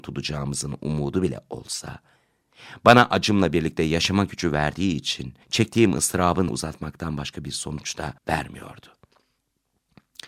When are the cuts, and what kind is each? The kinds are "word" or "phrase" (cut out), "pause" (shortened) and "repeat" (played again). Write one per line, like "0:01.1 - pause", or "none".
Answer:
0:05.4 - pause
0:06.5 - word
0:08.2 - pause